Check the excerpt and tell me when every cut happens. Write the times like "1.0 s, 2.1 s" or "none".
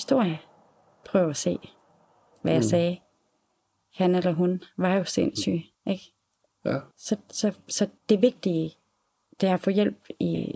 5.7 s, 6.9 s, 8.0 s